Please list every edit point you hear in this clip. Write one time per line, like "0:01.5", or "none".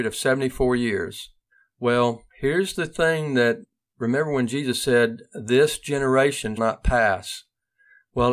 0:06.6